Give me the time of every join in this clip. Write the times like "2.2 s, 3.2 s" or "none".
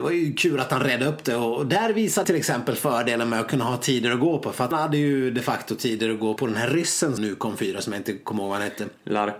2.2 s, 4.7 s, 6.4 s, 7.2 s